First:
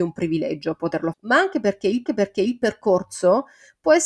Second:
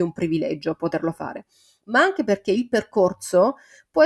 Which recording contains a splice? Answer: first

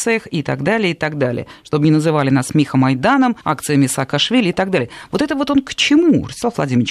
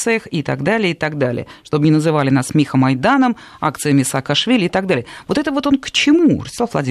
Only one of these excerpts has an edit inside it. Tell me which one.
first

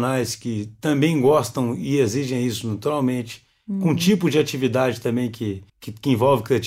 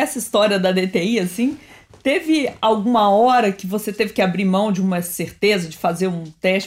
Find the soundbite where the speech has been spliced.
first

